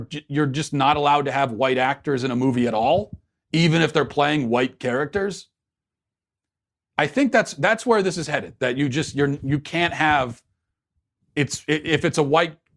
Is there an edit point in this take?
no; 0 cuts

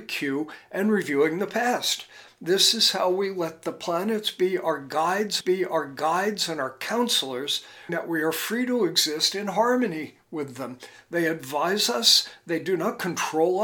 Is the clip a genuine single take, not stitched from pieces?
no; 2 cuts; at 5.4 s, 7.9 s

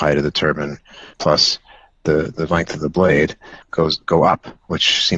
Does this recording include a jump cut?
yes; 2 cuts; at 1.1 s, 3.6 s

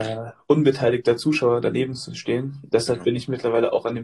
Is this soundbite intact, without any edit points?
no; 1 cut; at 2.7 s

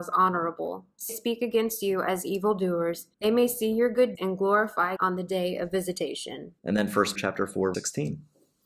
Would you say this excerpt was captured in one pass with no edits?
no; 7 cuts; at 1.1 s, 3.1 s, 4.2 s, 5.0 s, 6.6 s, 7.2 s, 7.7 s

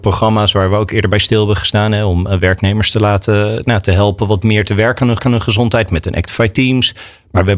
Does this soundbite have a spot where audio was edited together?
yes; 1 cut; at 5.2 s

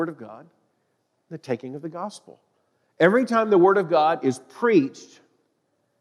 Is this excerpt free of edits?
yes; 0 cuts

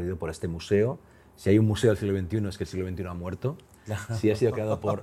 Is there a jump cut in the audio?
no; 0 cuts

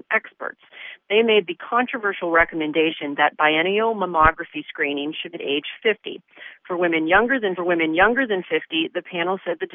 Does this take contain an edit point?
yes; 2 cuts; at 5.3 s, 7.6 s

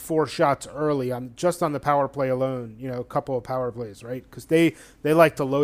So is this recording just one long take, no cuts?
yes; 0 cuts

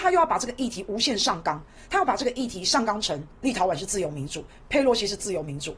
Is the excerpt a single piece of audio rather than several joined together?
no; 1 cut; at 3.3 s

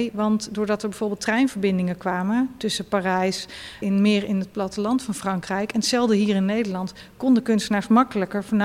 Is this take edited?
yes; 1 cut; at 3.8 s

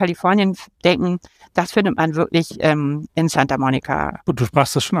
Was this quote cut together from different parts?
no; 0 cuts

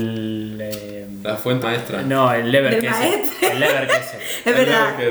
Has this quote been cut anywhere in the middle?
yes; 1 cut; at 1.6 s

